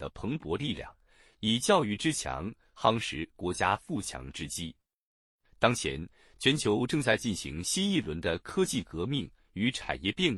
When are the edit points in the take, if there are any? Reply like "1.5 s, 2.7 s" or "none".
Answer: none